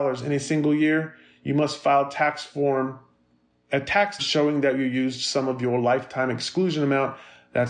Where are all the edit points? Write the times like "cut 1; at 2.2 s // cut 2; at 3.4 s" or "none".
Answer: cut 1; at 4.2 s